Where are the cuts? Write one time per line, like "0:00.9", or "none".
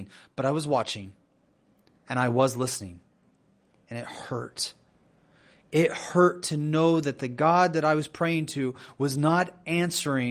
none